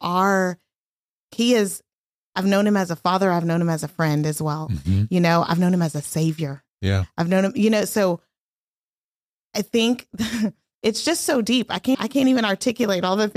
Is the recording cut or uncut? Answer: cut